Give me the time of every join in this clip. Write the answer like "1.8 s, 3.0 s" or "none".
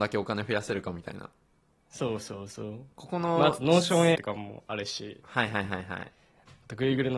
4.1 s